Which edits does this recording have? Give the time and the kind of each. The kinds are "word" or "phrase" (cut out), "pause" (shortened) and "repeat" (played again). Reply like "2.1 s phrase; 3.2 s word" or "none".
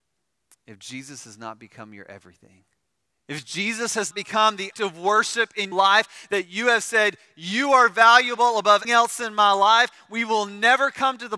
3.1 s pause; 4.1 s word; 4.7 s word; 5.7 s word; 8.8 s word